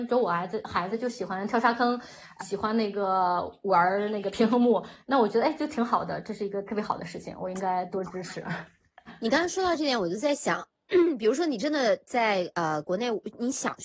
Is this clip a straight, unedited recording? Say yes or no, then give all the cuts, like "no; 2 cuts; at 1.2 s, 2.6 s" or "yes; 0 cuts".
no; 1 cut; at 2.4 s